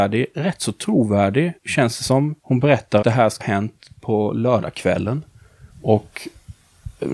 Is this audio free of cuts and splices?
no; 5 cuts; at 1.6 s, 2.4 s, 3.0 s, 3.4 s, 5.7 s

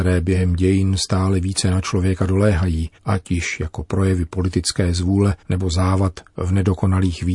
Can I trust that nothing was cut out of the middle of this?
no; 2 cuts; at 3.0 s, 5.4 s

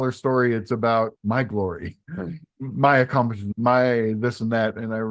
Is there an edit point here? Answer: yes; 2 cuts; at 1.1 s, 2.0 s

